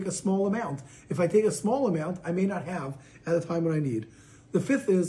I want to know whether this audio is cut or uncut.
uncut